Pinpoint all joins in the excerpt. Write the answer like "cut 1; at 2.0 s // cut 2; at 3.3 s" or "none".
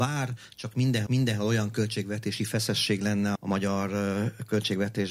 cut 1; at 1.1 s // cut 2; at 3.3 s